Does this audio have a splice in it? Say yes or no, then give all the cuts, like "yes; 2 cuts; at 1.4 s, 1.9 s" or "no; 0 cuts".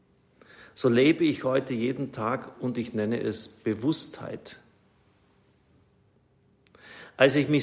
no; 0 cuts